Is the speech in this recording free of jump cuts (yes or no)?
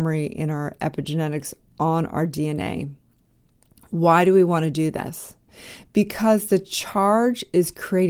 yes